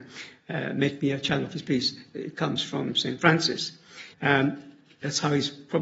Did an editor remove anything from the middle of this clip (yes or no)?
yes